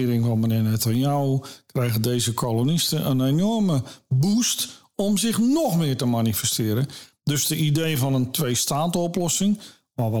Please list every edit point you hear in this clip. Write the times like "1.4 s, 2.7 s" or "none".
none

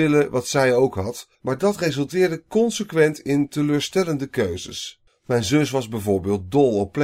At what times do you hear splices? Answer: 1.3 s, 5.1 s

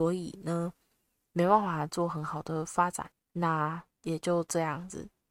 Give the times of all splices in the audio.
3.9 s

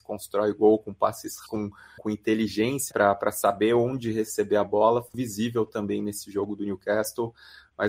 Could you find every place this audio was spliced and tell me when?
1.5 s, 2.0 s, 2.9 s, 5.1 s

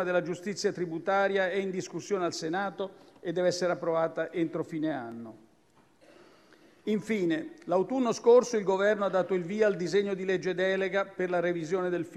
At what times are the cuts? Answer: none

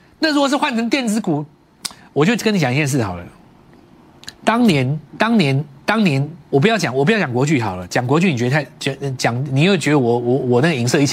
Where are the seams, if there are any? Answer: 5.1 s, 6.4 s

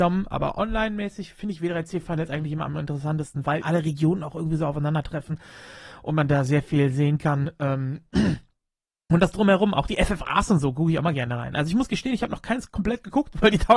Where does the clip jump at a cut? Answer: 3.6 s

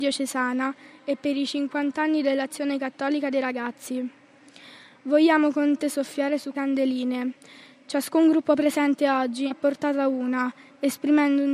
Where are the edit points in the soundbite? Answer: 5.8 s, 6.5 s, 9.5 s

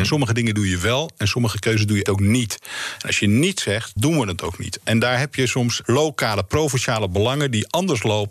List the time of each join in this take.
2.1 s, 4.0 s, 5.8 s

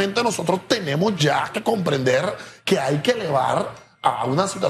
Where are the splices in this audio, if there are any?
none

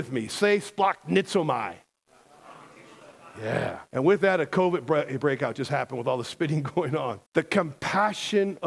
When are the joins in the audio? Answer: 3.9 s, 7.3 s

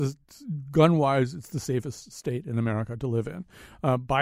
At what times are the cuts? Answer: none

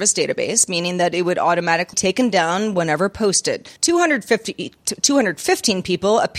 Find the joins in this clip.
1.9 s, 3.8 s

